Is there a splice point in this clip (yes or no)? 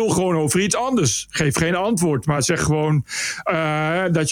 no